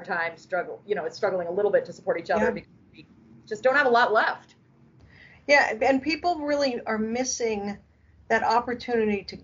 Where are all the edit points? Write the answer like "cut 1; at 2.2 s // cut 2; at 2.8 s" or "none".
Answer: none